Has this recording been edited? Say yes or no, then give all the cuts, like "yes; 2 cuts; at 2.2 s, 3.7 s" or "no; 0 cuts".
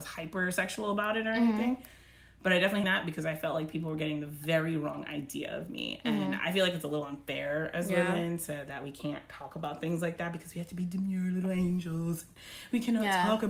yes; 1 cut; at 2.8 s